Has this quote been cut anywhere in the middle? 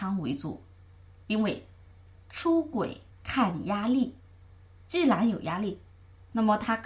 yes; 1 cut; at 3.1 s

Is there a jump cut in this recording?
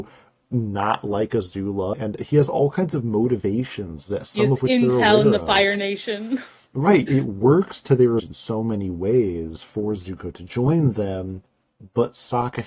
yes; 3 cuts; at 1.9 s, 7.1 s, 8.2 s

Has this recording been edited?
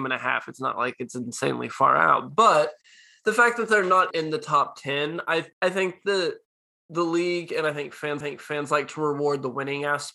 yes; 3 cuts; at 4.1 s, 5.5 s, 8.2 s

